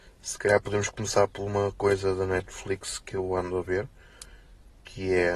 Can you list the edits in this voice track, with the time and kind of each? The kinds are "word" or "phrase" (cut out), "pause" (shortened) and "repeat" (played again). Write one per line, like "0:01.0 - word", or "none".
none